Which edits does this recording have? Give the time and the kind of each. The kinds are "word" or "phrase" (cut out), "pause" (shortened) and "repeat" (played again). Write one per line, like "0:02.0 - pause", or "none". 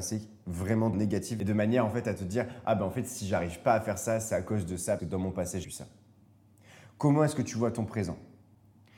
0:00.9 - word
0:05.0 - word
0:05.6 - word

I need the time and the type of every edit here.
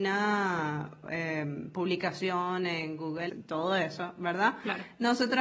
0:03.3 - word

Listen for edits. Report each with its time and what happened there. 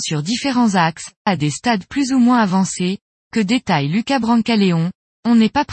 0:01.3 - word

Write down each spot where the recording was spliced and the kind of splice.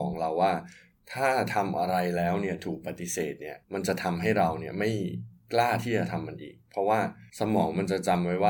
0:03.6 - pause
0:07.3 - pause

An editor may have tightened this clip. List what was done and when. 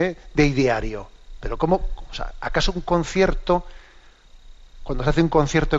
none

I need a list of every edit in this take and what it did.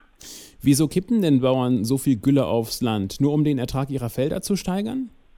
none

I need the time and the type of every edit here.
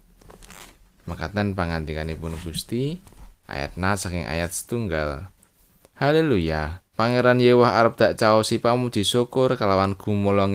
0:06.9 - pause

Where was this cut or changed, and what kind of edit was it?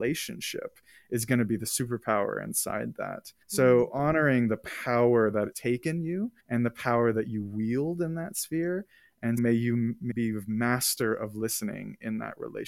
0:03.4 - pause
0:05.5 - word
0:06.4 - pause
0:09.4 - word
0:10.1 - word

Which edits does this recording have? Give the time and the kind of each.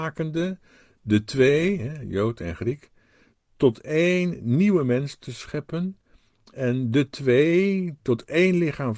none

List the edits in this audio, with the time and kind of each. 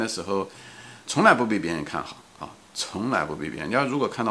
0:01.1 - phrase

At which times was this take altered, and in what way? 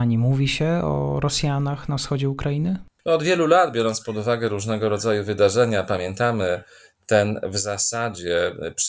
none

